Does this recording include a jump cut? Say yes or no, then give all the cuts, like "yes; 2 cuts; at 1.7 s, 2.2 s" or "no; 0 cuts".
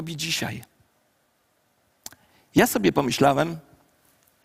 no; 0 cuts